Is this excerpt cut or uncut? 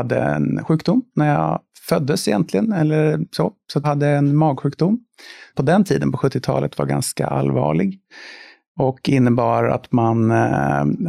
cut